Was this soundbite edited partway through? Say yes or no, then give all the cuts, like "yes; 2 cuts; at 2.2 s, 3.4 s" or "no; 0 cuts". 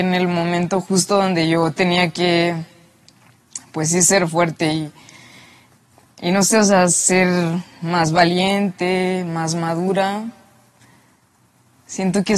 no; 0 cuts